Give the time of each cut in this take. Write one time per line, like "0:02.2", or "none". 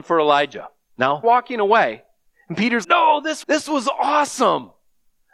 0:01.2
0:02.8
0:03.4